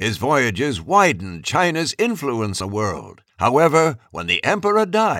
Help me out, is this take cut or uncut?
cut